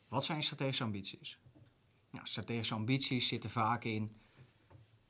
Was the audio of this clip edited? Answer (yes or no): no